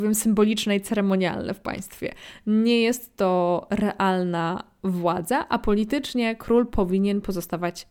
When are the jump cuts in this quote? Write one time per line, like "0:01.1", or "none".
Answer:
none